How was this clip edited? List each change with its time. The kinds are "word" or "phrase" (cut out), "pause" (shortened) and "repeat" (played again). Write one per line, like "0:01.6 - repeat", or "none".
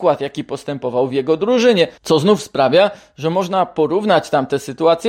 0:02.0 - pause